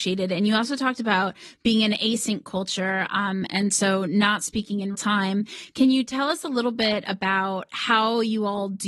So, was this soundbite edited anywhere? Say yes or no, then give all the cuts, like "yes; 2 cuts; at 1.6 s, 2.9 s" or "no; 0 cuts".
yes; 1 cut; at 4.9 s